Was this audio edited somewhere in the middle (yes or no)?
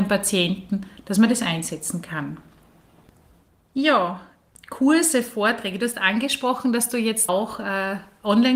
yes